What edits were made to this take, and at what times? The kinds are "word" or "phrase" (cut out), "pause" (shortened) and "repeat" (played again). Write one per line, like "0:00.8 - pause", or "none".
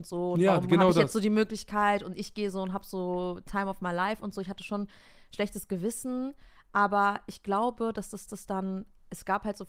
0:08.3 - repeat